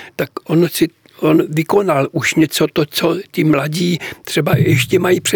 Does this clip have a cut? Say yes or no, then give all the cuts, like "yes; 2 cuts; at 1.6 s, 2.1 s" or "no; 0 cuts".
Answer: no; 0 cuts